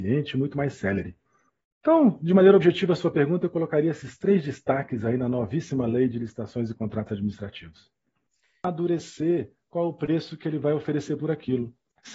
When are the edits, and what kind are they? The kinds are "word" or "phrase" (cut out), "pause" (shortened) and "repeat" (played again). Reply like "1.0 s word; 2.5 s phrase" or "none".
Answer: none